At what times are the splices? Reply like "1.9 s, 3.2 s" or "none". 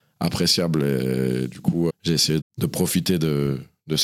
1.9 s, 2.4 s